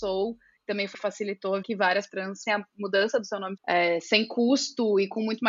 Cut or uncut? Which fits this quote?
cut